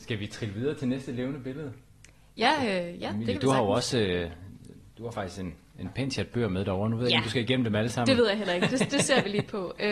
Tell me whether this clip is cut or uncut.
uncut